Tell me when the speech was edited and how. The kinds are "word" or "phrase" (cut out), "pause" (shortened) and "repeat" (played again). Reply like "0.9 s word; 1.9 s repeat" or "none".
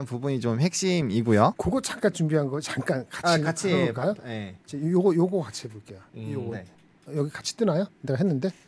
2.1 s word

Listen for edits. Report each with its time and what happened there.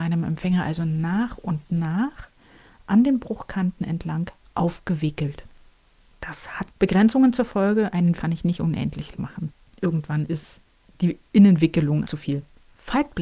6.7 s word; 8.2 s word; 9.1 s word; 12.0 s word

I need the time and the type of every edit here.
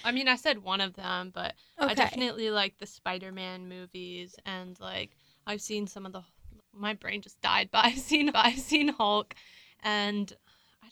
6.6 s word; 8.3 s repeat

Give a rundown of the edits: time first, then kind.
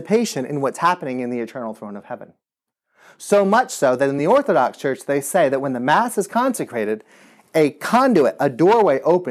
none

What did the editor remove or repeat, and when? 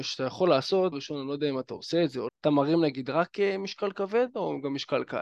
0.9 s word; 2.3 s word

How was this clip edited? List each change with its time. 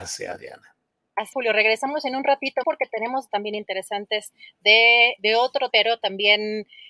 1.3 s word; 2.6 s word; 3.3 s word; 5.2 s word; 5.7 s word

